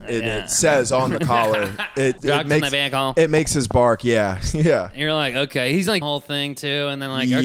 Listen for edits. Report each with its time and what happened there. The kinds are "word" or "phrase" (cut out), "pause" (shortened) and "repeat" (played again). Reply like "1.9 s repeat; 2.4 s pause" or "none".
2.2 s word; 6.0 s phrase